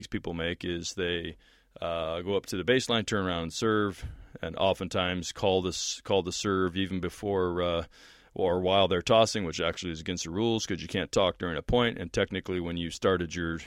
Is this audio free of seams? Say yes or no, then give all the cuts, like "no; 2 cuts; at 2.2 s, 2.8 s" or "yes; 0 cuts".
yes; 0 cuts